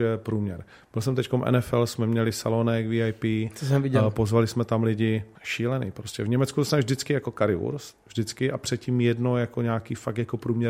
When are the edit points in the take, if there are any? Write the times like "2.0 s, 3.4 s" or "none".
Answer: 5.3 s